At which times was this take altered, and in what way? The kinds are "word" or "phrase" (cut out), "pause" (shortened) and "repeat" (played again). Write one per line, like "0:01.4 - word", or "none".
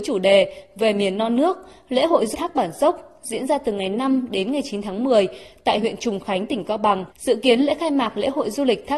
0:02.3 - word
0:07.1 - pause